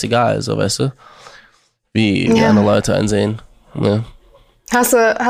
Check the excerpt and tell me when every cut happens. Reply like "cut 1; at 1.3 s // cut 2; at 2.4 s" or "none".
none